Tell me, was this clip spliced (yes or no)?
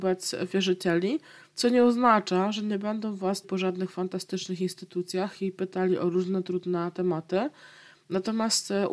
yes